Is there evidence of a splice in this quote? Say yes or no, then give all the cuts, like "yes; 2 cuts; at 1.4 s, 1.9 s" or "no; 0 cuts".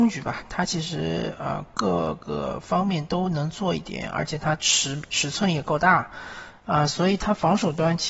no; 0 cuts